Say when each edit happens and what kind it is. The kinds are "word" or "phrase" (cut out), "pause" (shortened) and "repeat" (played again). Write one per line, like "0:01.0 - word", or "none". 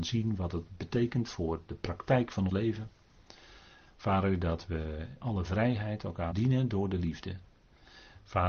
0:02.5 - word
0:05.2 - word
0:06.3 - word